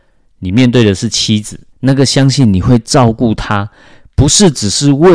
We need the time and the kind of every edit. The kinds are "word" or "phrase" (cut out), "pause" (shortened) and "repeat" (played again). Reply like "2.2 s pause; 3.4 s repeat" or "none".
1.7 s pause

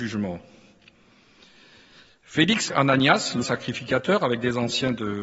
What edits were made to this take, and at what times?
2.7 s word; 3.4 s word

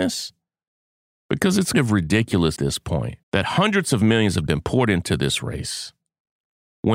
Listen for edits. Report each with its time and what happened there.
1.7 s word; 2.6 s word; 3.2 s pause; 4.5 s phrase

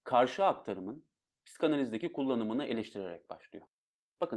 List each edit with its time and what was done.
none

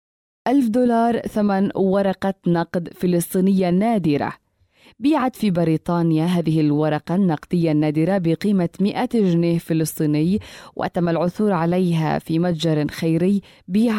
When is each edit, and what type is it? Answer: none

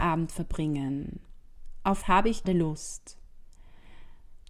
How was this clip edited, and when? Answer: 2.0 s word; 2.4 s word

